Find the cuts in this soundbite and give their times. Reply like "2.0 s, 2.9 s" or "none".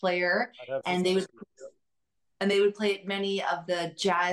none